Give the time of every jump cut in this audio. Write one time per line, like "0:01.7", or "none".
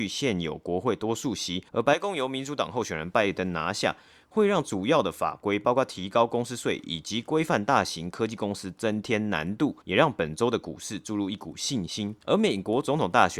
0:01.7
0:09.8
0:12.2